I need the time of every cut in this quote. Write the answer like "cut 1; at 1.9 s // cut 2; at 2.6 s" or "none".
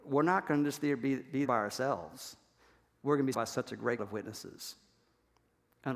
cut 1; at 1.4 s // cut 2; at 3.3 s // cut 3; at 4.0 s